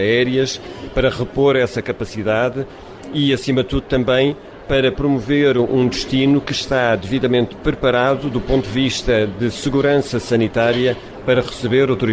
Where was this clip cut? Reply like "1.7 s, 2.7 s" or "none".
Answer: none

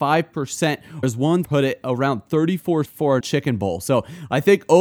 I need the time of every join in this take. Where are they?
1.0 s, 1.4 s, 2.8 s, 3.2 s

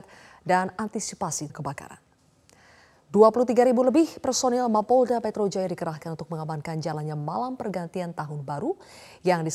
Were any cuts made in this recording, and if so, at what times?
1.5 s

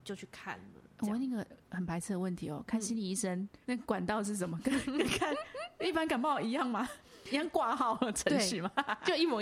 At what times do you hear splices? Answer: 3.6 s

